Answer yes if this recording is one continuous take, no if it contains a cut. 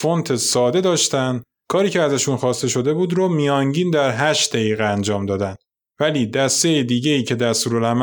yes